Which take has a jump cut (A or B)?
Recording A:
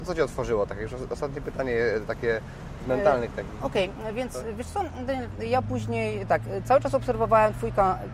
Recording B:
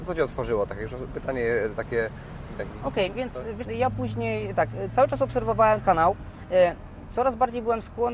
B